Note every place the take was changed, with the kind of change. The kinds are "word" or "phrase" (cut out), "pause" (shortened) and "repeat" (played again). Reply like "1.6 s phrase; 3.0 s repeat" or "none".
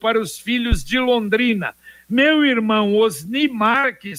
none